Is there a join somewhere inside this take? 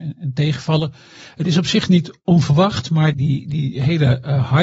yes; 1 cut; at 3.1 s

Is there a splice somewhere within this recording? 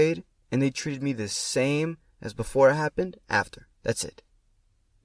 yes; 1 cut; at 3.7 s

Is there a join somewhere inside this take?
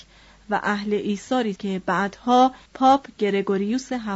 yes; 2 cuts; at 1.6 s, 2.7 s

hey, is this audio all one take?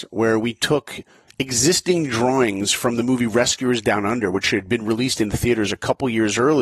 yes; 0 cuts

